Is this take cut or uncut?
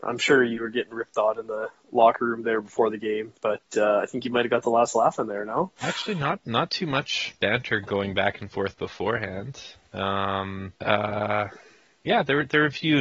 cut